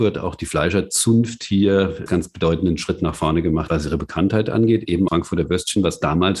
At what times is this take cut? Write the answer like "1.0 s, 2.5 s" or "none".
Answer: 2.1 s, 3.7 s, 5.1 s

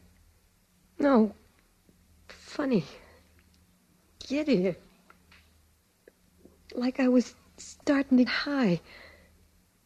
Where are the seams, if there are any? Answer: 7.8 s, 8.3 s

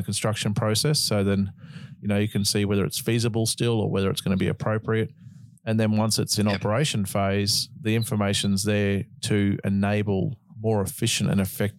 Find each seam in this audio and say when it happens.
none

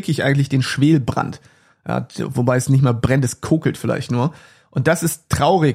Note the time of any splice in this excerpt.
none

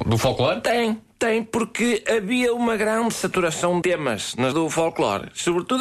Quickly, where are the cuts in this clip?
3.8 s, 4.5 s

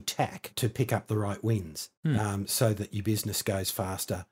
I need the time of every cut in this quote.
2.0 s

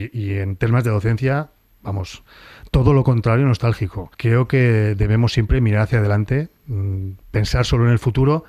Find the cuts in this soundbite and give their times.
4.1 s

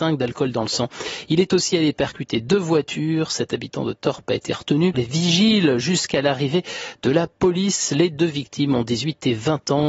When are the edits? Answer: 4.9 s

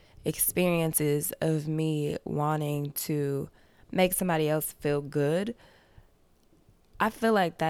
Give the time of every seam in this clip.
none

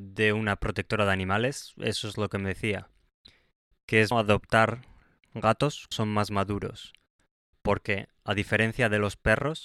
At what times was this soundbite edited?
4.1 s, 5.9 s

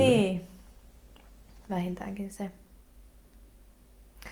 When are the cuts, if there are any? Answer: none

